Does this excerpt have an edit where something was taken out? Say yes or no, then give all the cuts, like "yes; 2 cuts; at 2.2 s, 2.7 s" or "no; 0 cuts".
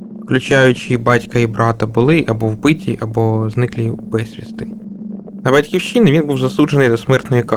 no; 0 cuts